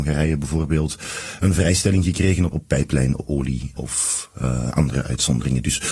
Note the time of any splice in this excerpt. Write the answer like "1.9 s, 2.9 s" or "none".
2.5 s, 3.8 s